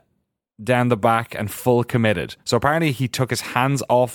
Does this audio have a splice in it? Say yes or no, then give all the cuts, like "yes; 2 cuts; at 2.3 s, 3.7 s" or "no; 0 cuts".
no; 0 cuts